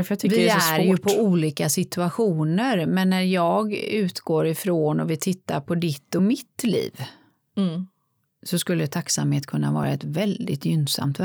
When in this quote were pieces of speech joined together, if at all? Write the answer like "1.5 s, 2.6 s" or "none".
none